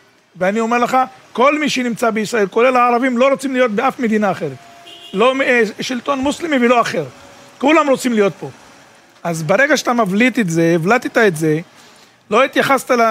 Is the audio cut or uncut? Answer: uncut